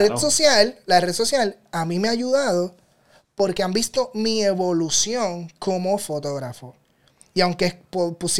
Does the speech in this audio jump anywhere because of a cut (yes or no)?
no